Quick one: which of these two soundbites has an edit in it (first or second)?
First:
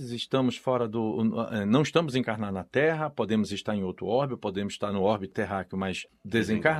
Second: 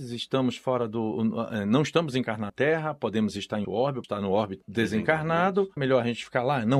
second